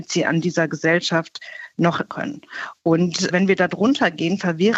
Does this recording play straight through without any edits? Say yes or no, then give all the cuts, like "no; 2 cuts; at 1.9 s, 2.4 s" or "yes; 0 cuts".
no; 1 cut; at 2.1 s